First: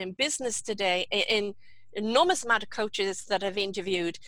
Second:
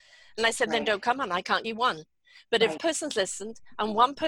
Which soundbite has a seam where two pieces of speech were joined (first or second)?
second